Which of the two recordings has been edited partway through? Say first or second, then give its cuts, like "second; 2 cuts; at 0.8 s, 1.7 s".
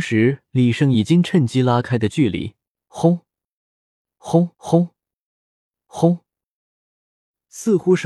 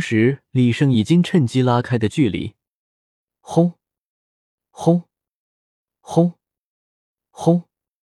first; 2 cuts; at 2.7 s, 4.5 s